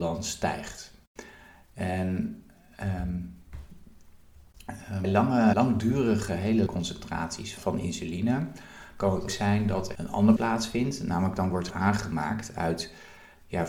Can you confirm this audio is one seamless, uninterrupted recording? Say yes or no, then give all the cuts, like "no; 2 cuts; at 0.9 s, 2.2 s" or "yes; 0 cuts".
no; 8 cuts; at 5.0 s, 5.5 s, 6.7 s, 7.6 s, 9.3 s, 10.0 s, 10.4 s, 11.7 s